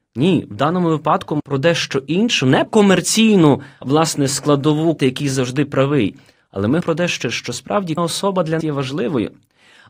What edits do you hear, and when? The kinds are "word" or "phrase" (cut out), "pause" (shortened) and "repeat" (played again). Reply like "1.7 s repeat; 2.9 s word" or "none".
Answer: 1.4 s word; 2.7 s word; 3.8 s word; 5.0 s word; 6.8 s word; 7.2 s word; 8.0 s word; 8.6 s word